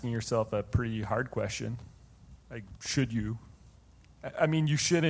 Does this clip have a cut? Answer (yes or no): yes